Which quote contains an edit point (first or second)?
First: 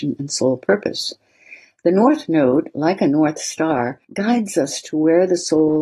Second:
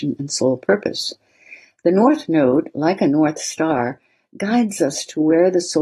first